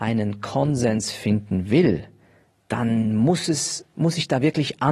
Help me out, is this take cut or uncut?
uncut